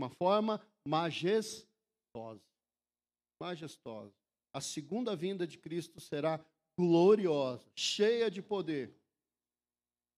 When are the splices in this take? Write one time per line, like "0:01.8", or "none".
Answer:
none